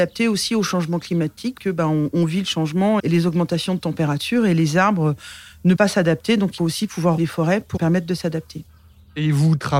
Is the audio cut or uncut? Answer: cut